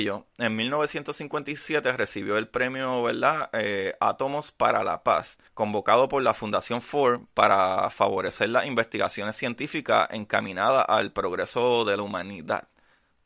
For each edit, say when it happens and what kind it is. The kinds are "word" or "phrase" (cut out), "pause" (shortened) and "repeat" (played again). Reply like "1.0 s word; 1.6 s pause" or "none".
5.5 s pause